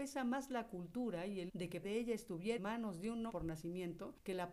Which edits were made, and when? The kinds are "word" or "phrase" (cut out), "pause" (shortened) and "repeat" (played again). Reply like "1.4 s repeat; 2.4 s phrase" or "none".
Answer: 1.5 s word; 1.8 s word; 2.6 s word; 3.3 s word